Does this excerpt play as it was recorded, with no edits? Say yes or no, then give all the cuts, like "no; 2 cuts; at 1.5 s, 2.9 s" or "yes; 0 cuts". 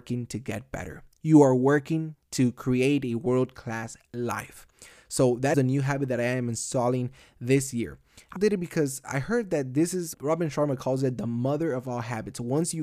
no; 3 cuts; at 5.5 s, 8.4 s, 10.1 s